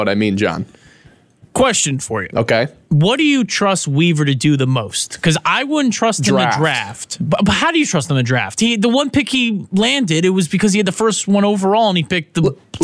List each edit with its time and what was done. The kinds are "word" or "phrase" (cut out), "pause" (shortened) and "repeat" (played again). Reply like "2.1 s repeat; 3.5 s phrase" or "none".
none